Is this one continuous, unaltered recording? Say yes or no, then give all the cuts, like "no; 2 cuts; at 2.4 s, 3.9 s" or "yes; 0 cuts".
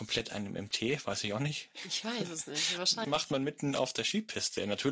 no; 1 cut; at 3.0 s